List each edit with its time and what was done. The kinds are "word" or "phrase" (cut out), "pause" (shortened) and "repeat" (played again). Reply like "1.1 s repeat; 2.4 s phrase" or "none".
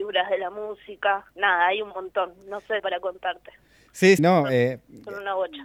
1.3 s pause; 2.8 s phrase; 4.2 s word